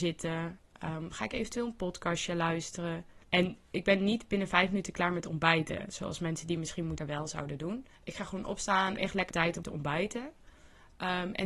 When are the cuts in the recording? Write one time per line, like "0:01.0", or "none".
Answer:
0:03.2
0:07.0
0:07.9
0:09.0
0:09.3
0:09.6